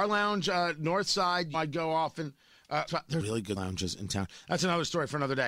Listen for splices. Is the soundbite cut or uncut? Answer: cut